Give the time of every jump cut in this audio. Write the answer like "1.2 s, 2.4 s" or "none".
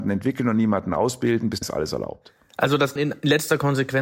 1.6 s, 3.0 s